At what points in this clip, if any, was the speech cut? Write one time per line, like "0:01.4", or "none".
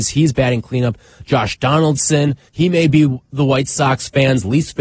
0:02.5